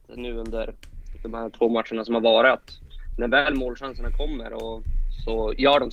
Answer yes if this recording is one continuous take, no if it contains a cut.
yes